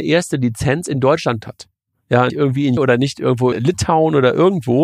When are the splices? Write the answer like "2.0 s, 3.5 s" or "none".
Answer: 1.4 s, 2.3 s, 2.8 s, 3.5 s